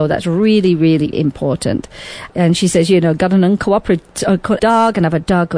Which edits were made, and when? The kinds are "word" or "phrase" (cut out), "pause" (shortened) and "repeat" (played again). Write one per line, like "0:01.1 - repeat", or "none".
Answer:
0:01.1 - word
0:04.6 - word